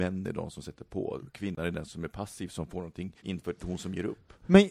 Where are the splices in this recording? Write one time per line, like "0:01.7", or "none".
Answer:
0:01.9
0:03.2